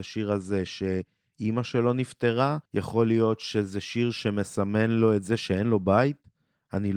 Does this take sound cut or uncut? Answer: cut